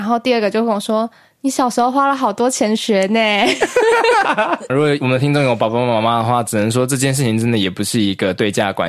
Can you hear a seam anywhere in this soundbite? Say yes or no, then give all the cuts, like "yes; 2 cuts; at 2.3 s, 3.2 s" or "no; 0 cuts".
yes; 2 cuts; at 4.2 s, 4.7 s